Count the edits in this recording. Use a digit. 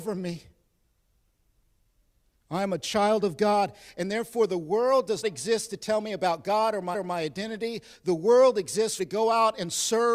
3